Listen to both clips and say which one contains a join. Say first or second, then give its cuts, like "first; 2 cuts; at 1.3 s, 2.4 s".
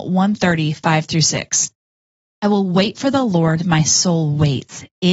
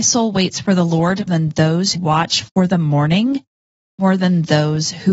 second; 2 cuts; at 1.3 s, 1.9 s